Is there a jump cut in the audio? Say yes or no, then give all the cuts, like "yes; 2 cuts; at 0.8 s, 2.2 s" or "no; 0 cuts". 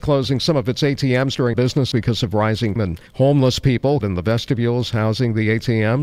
yes; 5 cuts; at 1.5 s, 1.9 s, 2.8 s, 3.1 s, 4.0 s